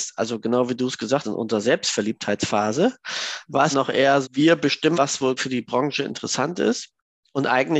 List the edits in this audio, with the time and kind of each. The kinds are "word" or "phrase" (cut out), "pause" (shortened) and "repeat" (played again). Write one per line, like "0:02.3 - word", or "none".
0:01.2 - word
0:03.7 - word
0:04.2 - word
0:04.9 - word
0:05.4 - word